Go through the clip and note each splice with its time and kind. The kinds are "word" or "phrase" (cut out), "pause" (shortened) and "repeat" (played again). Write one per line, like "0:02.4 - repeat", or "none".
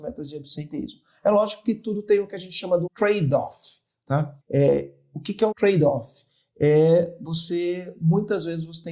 0:02.9 - word
0:04.4 - pause
0:05.5 - word